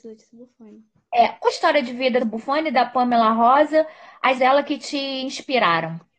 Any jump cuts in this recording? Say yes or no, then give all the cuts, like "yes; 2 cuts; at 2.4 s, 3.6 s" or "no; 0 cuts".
yes; 3 cuts; at 1.5 s, 2.2 s, 4.4 s